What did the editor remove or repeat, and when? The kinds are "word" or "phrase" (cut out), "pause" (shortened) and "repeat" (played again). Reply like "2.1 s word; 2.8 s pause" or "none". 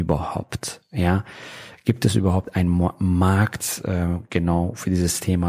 none